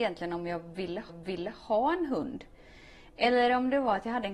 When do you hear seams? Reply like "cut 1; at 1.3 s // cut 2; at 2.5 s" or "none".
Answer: cut 1; at 1.1 s